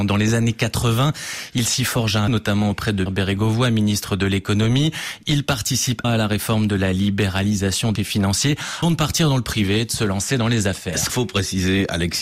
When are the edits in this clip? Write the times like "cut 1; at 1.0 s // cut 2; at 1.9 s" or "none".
cut 1; at 2.3 s // cut 2; at 3.1 s // cut 3; at 6.0 s // cut 4; at 8.0 s // cut 5; at 8.8 s // cut 6; at 11.1 s

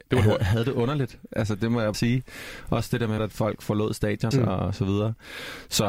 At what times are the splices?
cut 1; at 1.9 s // cut 2; at 3.2 s // cut 3; at 4.3 s

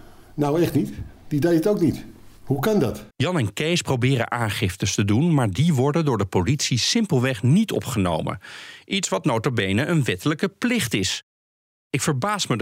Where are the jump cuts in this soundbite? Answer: cut 1; at 2.4 s // cut 2; at 3.1 s

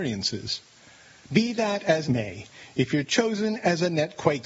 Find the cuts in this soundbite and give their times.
cut 1; at 2.0 s

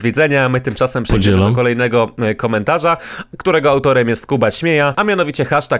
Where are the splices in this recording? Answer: none

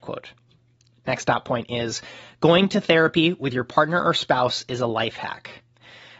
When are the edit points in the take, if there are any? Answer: none

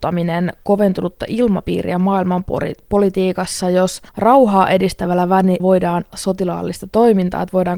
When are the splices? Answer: cut 1; at 4.1 s // cut 2; at 5.6 s // cut 3; at 6.1 s

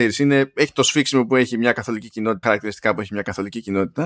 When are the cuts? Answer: cut 1; at 2.4 s

